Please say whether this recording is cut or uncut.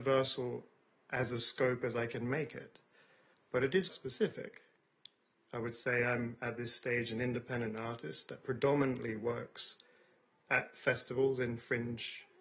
cut